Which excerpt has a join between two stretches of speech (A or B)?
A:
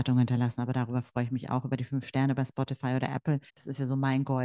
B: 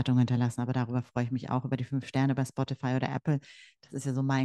A